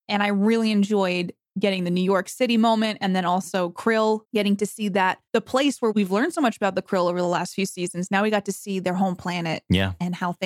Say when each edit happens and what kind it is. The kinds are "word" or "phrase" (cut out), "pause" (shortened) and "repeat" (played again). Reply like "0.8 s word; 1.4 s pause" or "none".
4.2 s pause; 5.3 s pause

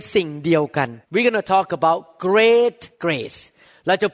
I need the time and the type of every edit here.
1.0 s pause; 2.9 s pause

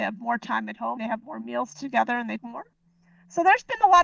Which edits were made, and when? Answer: 1.0 s word; 2.4 s word

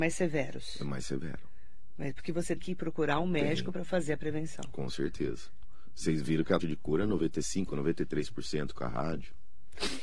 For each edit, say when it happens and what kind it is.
2.2 s word; 2.6 s word; 6.6 s word

